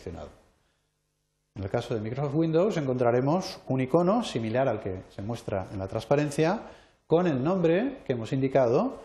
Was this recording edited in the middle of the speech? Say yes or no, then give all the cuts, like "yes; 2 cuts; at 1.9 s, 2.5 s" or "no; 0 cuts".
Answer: no; 0 cuts